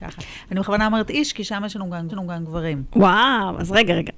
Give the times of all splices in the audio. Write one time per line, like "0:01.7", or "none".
0:02.1